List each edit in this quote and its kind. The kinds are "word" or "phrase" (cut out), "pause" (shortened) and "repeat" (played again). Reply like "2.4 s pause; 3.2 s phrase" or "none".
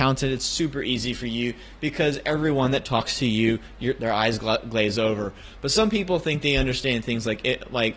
none